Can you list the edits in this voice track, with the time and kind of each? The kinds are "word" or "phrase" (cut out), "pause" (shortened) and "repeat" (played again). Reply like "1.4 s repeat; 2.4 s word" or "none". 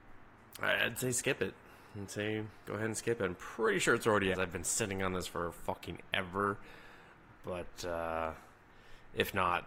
2.6 s word; 4.3 s phrase